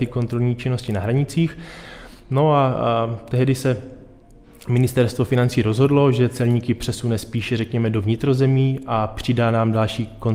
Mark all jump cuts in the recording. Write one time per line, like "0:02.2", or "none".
none